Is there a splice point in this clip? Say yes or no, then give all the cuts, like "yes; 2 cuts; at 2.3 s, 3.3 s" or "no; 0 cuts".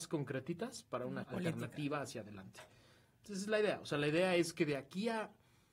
yes; 1 cut; at 1.2 s